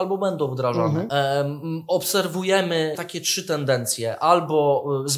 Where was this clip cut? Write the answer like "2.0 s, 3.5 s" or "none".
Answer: 2.9 s